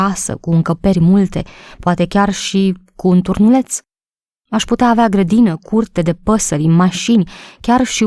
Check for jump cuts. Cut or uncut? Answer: uncut